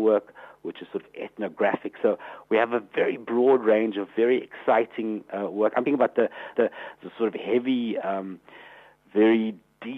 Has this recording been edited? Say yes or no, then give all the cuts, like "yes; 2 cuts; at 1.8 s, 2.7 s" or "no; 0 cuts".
yes; 2 cuts; at 5.9 s, 6.5 s